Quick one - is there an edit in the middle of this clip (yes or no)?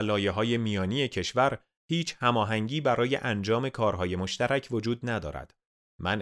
no